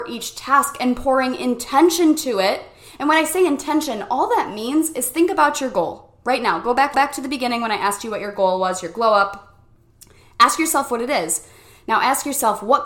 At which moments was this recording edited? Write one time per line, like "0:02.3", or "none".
0:06.9

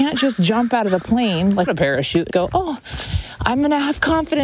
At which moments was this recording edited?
0:01.7
0:02.3

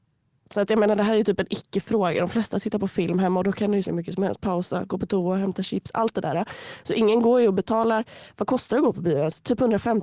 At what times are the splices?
0:03.8

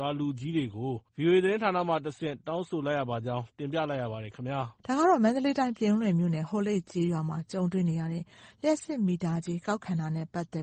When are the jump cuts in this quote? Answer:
0:01.1
0:04.8

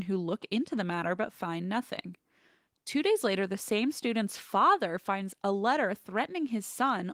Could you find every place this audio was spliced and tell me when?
none

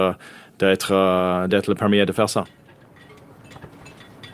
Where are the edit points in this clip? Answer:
0:01.5

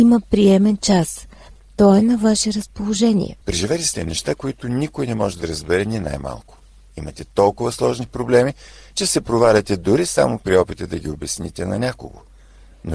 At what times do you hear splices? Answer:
0:03.4

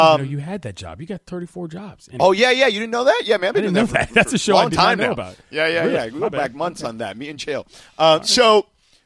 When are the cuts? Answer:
none

